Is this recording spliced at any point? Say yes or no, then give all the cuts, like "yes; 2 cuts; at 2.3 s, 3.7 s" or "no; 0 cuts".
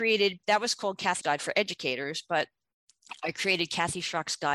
yes; 1 cut; at 1.2 s